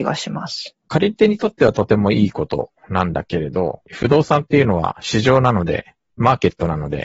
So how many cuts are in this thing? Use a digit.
1